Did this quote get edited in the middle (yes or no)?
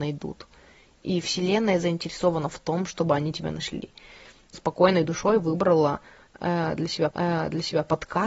yes